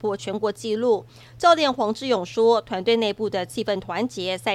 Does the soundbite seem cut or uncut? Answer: uncut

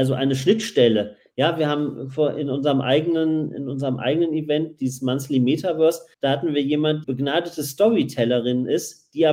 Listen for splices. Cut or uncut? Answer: cut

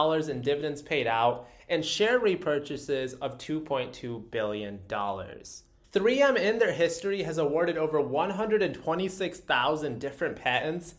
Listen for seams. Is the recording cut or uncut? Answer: uncut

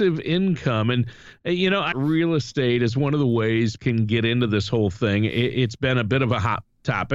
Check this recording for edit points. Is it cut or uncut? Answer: cut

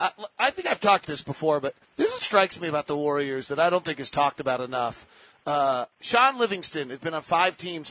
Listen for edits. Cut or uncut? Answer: cut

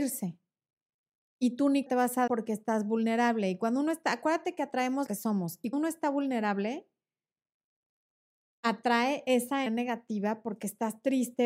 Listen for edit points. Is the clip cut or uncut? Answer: cut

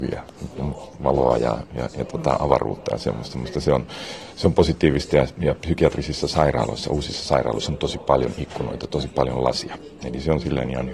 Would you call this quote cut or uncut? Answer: uncut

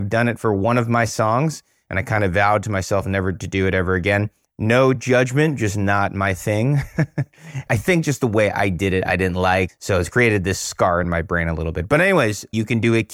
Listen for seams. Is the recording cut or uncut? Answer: uncut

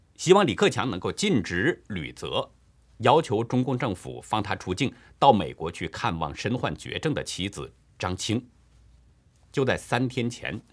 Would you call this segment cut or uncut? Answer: uncut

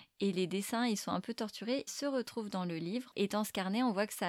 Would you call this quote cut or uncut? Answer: cut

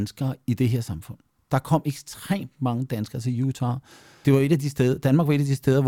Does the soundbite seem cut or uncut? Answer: cut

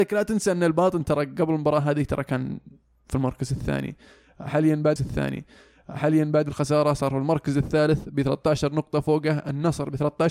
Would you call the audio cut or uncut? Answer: cut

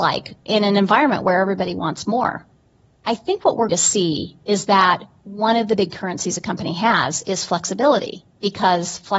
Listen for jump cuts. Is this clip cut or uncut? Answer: cut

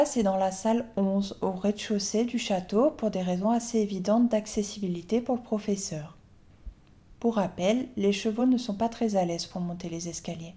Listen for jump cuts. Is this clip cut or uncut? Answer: uncut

